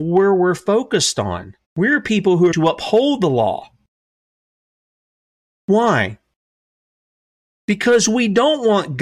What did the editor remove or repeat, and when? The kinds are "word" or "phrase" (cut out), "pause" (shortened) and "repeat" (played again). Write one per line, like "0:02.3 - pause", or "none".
0:01.6 - pause
0:02.5 - word